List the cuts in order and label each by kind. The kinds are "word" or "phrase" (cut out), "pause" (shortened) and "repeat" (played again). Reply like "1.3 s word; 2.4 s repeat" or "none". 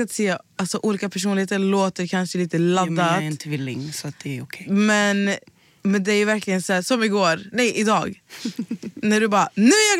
none